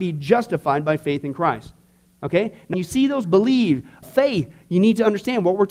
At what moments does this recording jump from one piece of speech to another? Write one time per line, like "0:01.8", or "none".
0:02.7
0:03.2
0:04.0